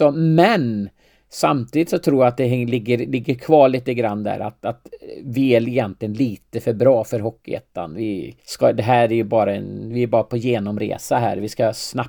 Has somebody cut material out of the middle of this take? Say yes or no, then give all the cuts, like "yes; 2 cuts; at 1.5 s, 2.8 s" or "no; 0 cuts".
yes; 1 cut; at 8.4 s